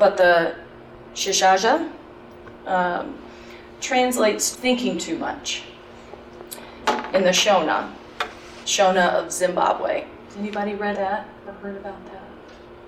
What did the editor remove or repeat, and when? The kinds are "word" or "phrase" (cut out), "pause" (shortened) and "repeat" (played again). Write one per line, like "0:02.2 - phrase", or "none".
0:01.0 - word
0:03.8 - word
0:04.5 - word
0:08.6 - word
0:10.9 - word